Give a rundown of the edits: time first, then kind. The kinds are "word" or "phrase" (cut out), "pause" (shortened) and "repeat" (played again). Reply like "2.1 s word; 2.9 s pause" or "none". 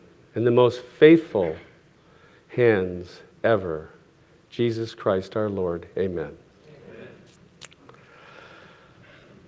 none